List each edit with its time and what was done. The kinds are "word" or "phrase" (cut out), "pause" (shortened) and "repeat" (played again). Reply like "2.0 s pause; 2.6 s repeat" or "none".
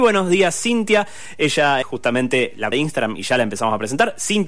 1.8 s word; 2.7 s word